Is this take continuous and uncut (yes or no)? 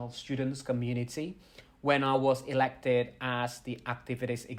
yes